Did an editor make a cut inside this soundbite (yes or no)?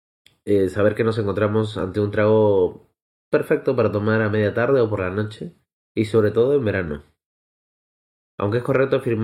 no